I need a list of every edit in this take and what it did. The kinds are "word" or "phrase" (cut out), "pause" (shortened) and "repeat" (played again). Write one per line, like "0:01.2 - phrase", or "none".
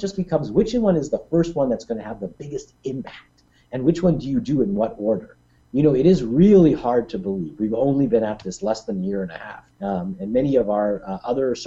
0:09.7 - pause

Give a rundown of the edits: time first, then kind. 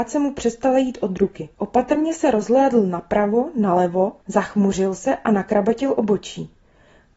0:01.5 - pause
0:04.2 - pause

